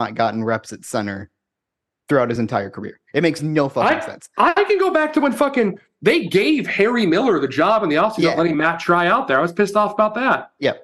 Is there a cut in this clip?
no; 0 cuts

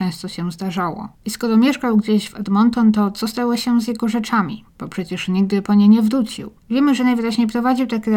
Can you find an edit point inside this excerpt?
yes; 3 cuts; at 1.1 s, 4.7 s, 6.6 s

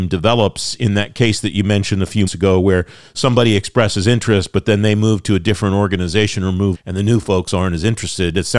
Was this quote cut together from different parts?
yes; 2 cuts; at 2.3 s, 6.7 s

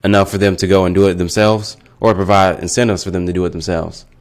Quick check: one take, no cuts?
yes; 0 cuts

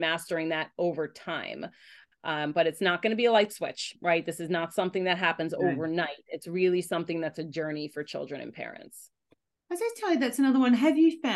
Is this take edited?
no; 0 cuts

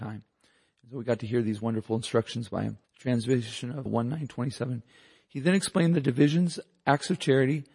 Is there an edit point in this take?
yes; 2 cuts; at 2.8 s, 3.9 s

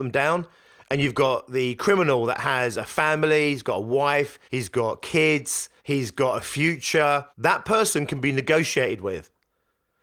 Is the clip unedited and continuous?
no; 3 cuts; at 4.4 s, 5.8 s, 7.3 s

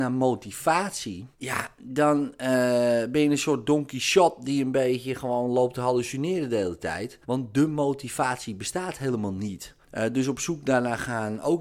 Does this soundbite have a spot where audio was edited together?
yes; 3 cuts; at 1.3 s, 7.2 s, 9.8 s

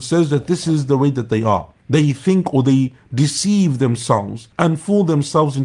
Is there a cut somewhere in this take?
yes; 2 cuts; at 1.8 s, 4.5 s

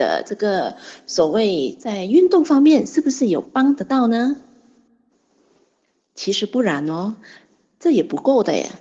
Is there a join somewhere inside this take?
no; 0 cuts

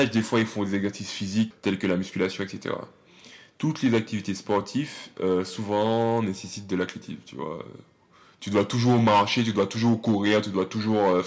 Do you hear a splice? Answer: yes; 1 cut; at 1.5 s

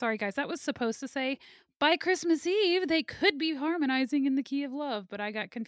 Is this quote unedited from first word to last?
yes; 0 cuts

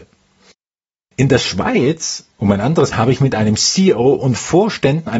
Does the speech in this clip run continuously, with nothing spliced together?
no; 2 cuts; at 2.3 s, 2.9 s

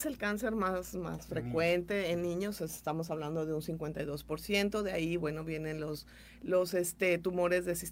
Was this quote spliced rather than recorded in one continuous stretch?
no; 0 cuts

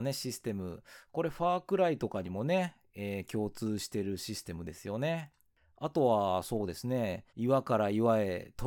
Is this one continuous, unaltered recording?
no; 1 cut; at 7.3 s

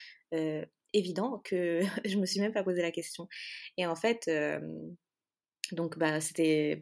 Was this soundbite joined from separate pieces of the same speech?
no; 0 cuts

